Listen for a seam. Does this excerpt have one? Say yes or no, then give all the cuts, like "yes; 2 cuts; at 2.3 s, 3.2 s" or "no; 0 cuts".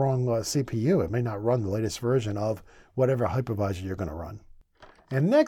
no; 0 cuts